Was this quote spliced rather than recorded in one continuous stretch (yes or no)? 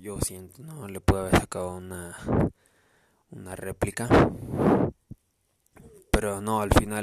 no